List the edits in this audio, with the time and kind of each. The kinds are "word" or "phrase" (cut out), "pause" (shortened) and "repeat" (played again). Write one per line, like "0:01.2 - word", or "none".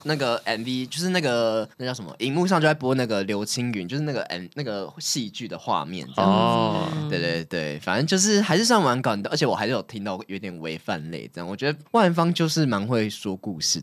0:01.7 - pause
0:11.8 - pause